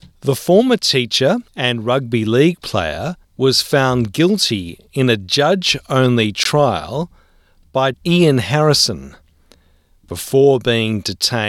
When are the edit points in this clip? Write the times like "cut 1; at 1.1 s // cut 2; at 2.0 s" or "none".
cut 1; at 1.5 s // cut 2; at 3.2 s // cut 3; at 7.9 s